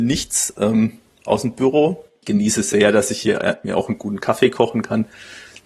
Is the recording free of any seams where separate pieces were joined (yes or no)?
yes